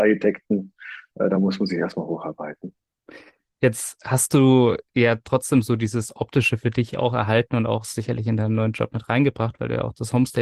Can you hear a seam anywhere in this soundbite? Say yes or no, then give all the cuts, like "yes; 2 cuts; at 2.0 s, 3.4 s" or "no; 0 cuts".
no; 0 cuts